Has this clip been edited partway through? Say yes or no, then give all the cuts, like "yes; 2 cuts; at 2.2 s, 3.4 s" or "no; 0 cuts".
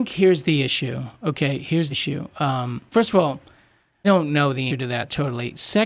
yes; 4 cuts; at 1.9 s, 2.9 s, 4.0 s, 4.7 s